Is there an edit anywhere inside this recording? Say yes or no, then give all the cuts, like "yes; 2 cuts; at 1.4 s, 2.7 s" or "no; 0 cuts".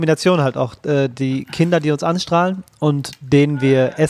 no; 0 cuts